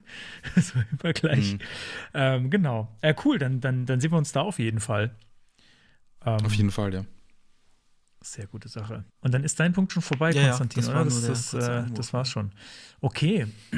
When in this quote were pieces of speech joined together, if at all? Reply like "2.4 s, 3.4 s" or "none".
9.1 s